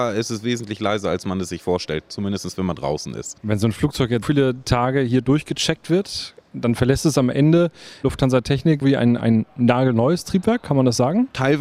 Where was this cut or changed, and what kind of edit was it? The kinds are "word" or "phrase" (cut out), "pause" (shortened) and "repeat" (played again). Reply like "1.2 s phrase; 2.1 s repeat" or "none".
4.2 s word; 8.8 s word